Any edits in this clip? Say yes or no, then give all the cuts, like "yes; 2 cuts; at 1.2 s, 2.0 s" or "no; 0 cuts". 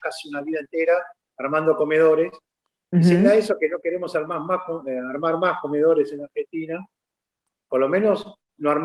no; 0 cuts